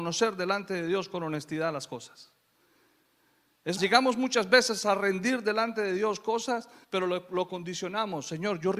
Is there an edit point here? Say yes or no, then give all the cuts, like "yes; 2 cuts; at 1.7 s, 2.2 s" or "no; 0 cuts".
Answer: yes; 2 cuts; at 3.8 s, 6.8 s